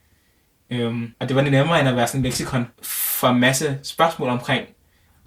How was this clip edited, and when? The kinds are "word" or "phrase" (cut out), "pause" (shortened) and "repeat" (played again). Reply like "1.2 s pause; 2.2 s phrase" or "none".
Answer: 1.1 s pause; 2.7 s pause